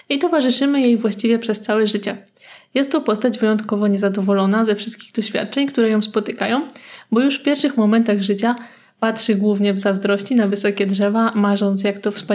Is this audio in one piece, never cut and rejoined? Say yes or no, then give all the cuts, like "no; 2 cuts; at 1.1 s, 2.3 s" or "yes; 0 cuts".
yes; 0 cuts